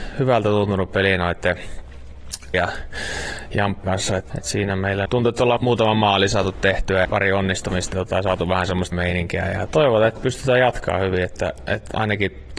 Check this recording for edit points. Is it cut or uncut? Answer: cut